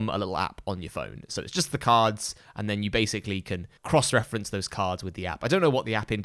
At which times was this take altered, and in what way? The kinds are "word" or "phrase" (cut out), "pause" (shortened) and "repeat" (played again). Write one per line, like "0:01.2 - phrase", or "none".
0:03.8 - pause